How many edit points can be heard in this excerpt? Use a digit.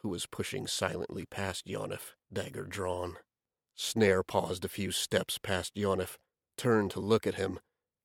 1